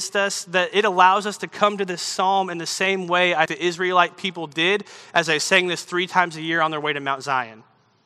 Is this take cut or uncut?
cut